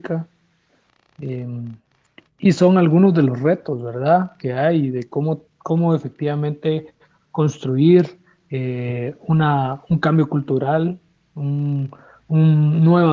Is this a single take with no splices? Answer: yes; 0 cuts

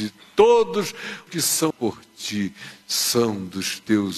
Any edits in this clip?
yes; 2 cuts; at 1.3 s, 1.7 s

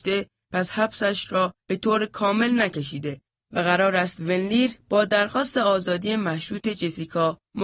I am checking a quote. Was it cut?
no; 0 cuts

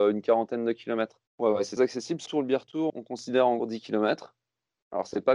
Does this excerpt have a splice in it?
yes; 5 cuts; at 1.3 s, 1.8 s, 2.3 s, 2.9 s, 3.6 s

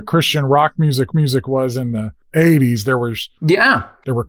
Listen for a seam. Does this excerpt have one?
yes; 1 cut; at 1.1 s

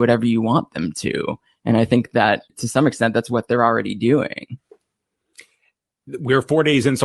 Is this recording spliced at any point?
yes; 1 cut; at 2.5 s

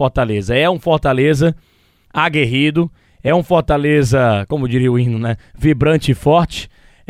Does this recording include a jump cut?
no; 0 cuts

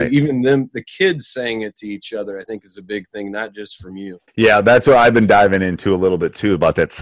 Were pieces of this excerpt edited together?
yes; 1 cut; at 4.3 s

